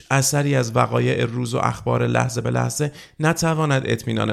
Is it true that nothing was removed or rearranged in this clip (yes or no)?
yes